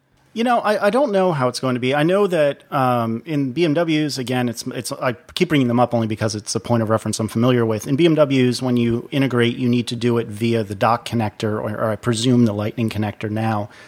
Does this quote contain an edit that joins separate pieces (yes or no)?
no